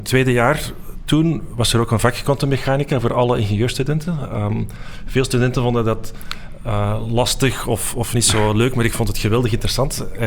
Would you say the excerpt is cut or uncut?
uncut